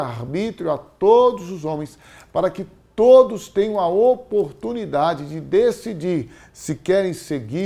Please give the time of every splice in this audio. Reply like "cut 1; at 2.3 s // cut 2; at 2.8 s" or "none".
none